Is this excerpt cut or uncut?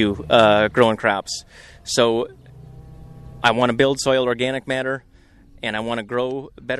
uncut